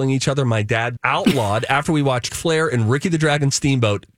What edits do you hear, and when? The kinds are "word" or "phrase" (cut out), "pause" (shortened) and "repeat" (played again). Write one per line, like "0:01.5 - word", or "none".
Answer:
0:01.0 - word
0:02.3 - word